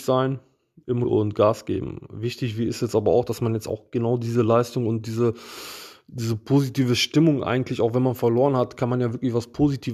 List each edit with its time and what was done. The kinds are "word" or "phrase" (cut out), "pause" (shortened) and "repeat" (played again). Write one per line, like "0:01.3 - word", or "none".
0:01.0 - word